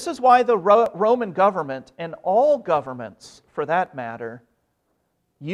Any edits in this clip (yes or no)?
no